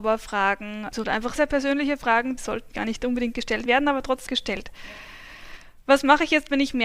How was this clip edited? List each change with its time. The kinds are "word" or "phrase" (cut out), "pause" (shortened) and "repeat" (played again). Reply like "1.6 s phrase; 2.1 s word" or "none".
1.0 s word; 1.4 s word; 2.4 s word; 2.7 s word; 3.7 s word; 4.3 s word